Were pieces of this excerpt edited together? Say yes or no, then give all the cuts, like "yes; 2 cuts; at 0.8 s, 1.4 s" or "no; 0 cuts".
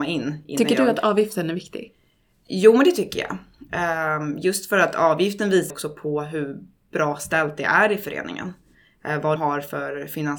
yes; 2 cuts; at 5.7 s, 9.4 s